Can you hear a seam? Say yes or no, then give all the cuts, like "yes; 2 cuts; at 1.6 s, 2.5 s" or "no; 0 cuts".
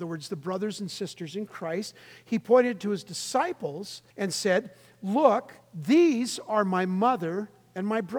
yes; 2 cuts; at 4.1 s, 5.6 s